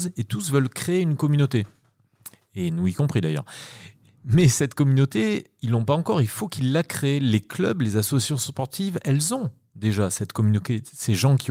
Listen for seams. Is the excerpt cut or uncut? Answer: uncut